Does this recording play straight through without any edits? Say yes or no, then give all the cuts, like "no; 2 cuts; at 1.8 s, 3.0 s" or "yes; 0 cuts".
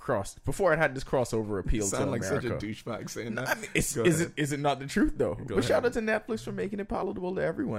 yes; 0 cuts